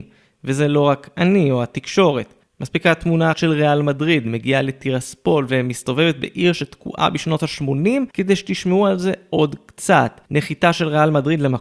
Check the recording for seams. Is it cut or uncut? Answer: cut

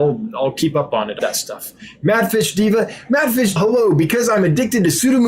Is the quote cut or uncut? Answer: cut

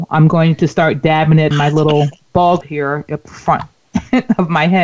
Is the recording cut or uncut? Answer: cut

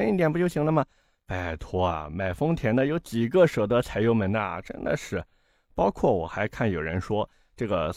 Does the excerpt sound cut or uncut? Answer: uncut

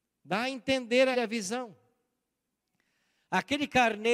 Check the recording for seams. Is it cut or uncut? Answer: cut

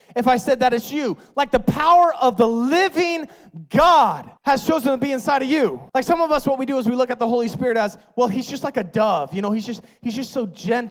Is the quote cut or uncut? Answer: cut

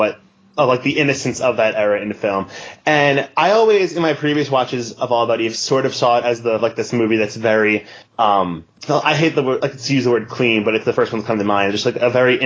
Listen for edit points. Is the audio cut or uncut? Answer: cut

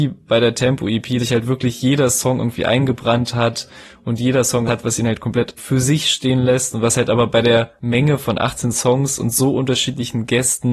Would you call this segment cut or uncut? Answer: cut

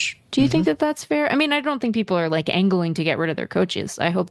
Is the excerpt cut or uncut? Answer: uncut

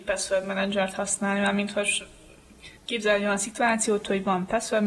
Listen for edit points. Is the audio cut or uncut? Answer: cut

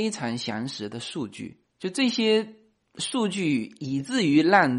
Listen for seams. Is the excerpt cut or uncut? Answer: uncut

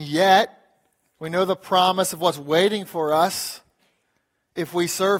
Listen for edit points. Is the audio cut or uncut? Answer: uncut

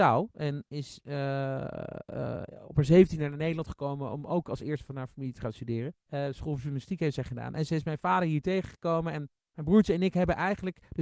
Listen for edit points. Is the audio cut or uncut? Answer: cut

